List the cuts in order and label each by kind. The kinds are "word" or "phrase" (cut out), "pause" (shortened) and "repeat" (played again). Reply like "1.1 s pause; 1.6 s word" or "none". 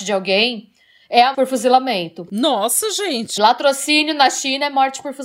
1.3 s word; 3.4 s word